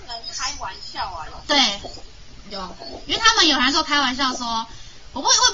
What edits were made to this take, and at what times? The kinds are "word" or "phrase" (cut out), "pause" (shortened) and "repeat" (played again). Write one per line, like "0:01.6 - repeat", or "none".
none